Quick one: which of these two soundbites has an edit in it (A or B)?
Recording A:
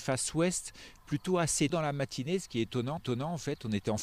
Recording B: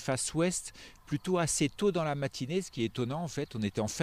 A